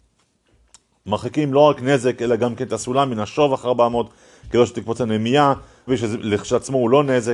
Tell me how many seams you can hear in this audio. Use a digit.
1